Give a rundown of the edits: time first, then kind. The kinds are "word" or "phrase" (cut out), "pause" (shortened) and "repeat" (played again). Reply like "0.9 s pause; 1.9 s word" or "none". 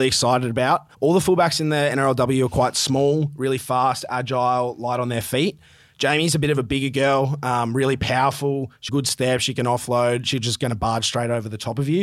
0.9 s pause; 8.9 s phrase